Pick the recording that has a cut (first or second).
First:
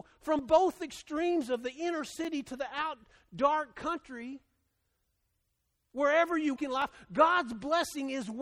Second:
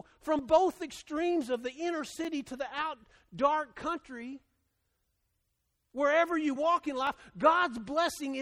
first